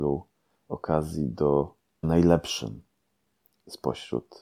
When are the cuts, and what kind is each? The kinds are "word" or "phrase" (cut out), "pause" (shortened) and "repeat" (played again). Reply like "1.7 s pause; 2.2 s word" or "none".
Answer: 2.0 s word